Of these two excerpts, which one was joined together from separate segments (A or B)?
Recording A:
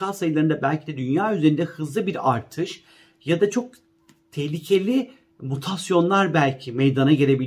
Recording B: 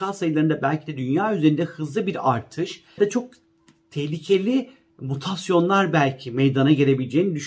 B